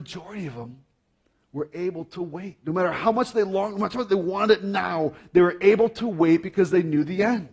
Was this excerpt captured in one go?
yes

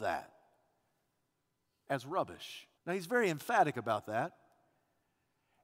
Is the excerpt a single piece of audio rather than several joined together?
no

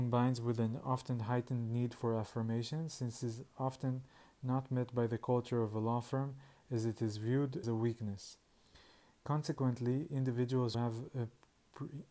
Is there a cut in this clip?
yes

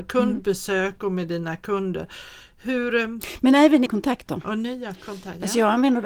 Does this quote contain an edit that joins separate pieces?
yes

